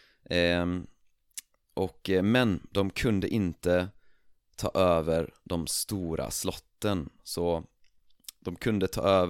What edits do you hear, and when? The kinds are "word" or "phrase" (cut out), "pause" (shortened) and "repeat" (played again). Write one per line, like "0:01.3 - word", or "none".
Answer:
none